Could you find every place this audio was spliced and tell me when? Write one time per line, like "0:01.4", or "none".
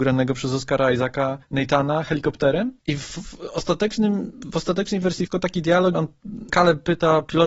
0:01.4
0:02.8
0:05.3
0:05.9
0:06.5